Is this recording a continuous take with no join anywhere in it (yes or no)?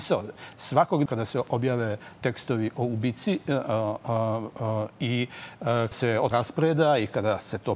no